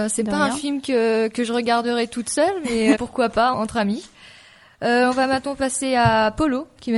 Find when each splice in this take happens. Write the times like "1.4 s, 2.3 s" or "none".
2.9 s, 3.5 s

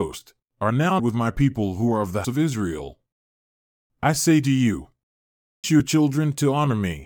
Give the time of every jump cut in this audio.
1.0 s, 2.2 s, 5.6 s

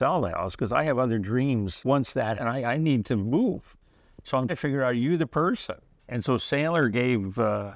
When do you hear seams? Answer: 2.3 s, 4.5 s

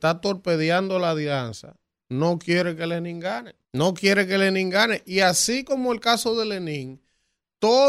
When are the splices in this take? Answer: 3.6 s

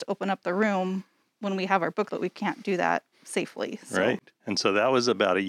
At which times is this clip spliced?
1.3 s, 2.1 s, 3.1 s

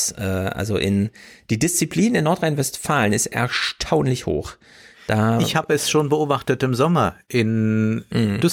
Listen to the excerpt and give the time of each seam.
none

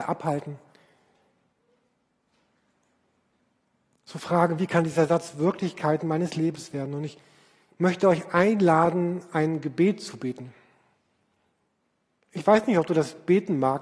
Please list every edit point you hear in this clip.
none

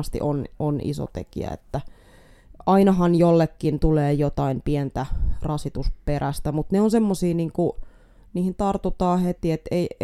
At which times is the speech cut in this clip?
none

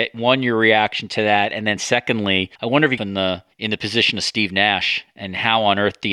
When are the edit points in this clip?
2.6 s, 3.0 s, 3.5 s

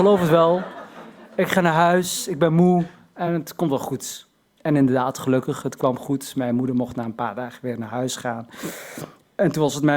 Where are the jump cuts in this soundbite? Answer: none

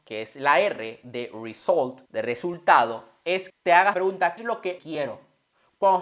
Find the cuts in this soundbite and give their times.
2.1 s, 3.5 s, 3.9 s, 4.4 s, 4.8 s

